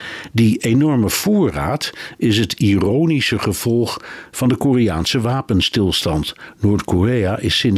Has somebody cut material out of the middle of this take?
no; 0 cuts

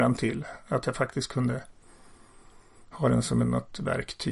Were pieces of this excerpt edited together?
no; 0 cuts

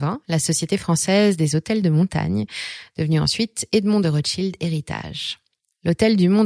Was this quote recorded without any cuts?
yes; 0 cuts

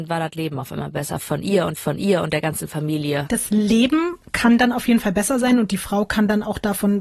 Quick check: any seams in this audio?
yes; 1 cut; at 1.7 s

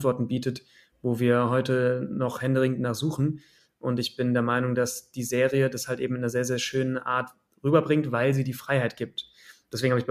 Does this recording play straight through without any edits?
yes; 0 cuts

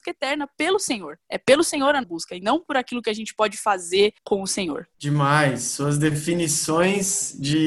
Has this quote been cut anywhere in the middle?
yes; 4 cuts; at 1.2 s, 2.0 s, 4.2 s, 4.9 s

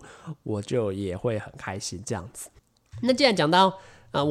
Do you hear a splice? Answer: yes; 1 cut; at 2.6 s

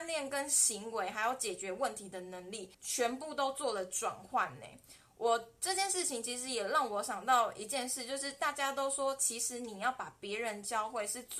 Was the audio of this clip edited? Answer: yes; 1 cut; at 2.7 s

